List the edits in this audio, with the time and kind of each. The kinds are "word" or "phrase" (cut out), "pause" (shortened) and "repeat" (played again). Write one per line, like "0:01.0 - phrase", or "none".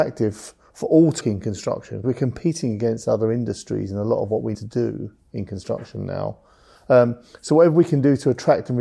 0:01.2 - word
0:02.0 - word
0:04.5 - word